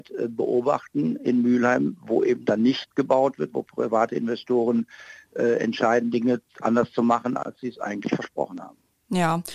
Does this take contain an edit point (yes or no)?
no